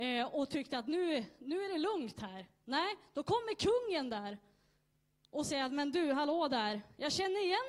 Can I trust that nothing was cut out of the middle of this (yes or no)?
yes